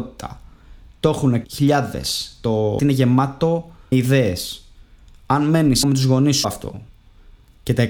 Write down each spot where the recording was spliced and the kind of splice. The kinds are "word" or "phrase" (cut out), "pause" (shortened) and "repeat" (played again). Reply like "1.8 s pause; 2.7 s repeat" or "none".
1.4 s word; 2.8 s word; 3.9 s word; 5.8 s word; 6.4 s word